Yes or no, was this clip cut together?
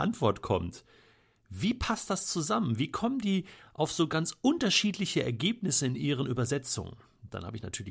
no